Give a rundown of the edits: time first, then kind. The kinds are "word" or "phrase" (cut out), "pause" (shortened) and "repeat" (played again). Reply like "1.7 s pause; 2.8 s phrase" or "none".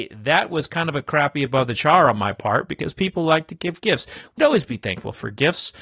4.4 s word